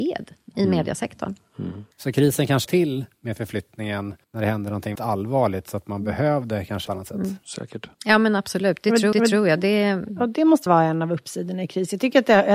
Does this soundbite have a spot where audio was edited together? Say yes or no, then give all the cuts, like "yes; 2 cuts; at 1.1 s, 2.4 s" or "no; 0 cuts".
yes; 8 cuts; at 1.9 s, 2.6 s, 4.2 s, 5.0 s, 6.9 s, 7.9 s, 9.1 s, 10.7 s